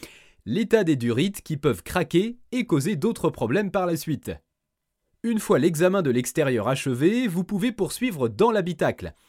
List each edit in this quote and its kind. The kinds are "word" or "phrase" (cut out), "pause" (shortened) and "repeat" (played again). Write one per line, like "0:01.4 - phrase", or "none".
0:04.8 - pause